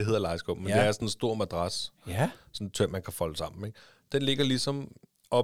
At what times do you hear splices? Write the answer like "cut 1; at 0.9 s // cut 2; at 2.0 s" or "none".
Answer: none